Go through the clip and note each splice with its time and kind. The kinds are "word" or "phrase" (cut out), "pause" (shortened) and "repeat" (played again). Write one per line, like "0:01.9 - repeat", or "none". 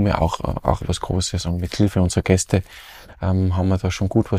none